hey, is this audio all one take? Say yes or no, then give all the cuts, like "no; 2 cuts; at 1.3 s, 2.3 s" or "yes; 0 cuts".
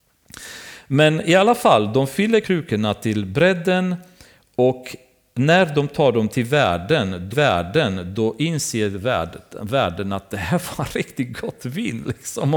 no; 3 cuts; at 2.4 s, 6.3 s, 7.3 s